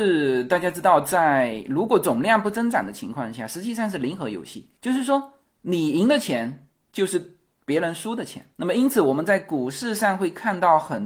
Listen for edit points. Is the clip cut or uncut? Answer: uncut